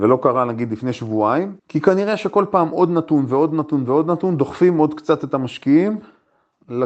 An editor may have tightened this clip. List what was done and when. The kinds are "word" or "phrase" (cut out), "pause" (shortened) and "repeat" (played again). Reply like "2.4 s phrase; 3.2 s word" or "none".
1.6 s pause